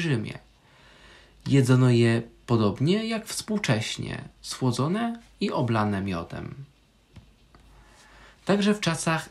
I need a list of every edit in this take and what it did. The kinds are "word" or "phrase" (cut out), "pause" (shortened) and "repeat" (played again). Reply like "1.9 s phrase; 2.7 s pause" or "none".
4.3 s pause